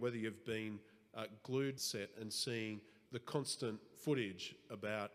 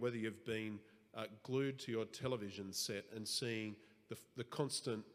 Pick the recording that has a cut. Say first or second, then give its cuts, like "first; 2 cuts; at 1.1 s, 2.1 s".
first; 2 cuts; at 1.8 s, 3.1 s